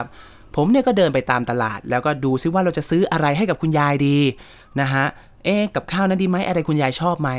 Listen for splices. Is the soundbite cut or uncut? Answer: uncut